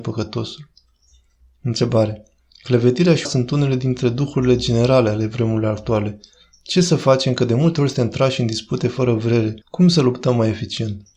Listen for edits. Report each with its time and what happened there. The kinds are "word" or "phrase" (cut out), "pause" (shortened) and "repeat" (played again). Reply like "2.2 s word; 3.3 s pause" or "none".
3.2 s word; 9.6 s pause